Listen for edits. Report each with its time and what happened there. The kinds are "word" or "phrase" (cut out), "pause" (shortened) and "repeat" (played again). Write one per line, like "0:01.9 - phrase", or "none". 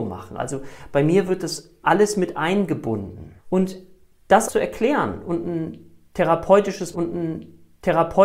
0:01.8 - word
0:03.4 - pause
0:04.5 - word
0:06.9 - repeat